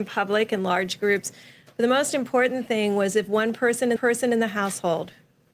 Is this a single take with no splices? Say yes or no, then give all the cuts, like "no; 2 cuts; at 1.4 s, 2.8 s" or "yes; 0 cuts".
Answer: no; 1 cut; at 4.0 s